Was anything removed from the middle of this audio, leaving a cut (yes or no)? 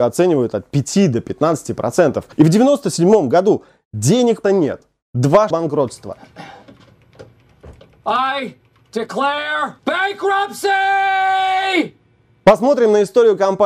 yes